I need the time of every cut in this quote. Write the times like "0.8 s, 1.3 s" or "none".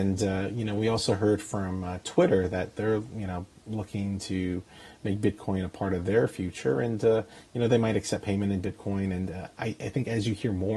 3.6 s